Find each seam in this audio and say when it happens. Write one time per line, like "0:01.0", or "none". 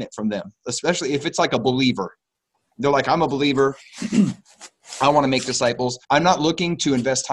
0:06.0